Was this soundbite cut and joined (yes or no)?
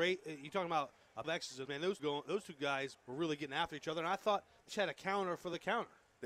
yes